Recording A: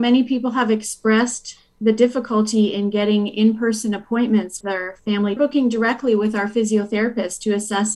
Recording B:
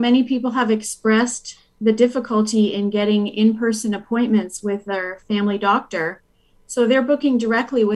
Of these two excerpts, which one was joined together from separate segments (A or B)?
A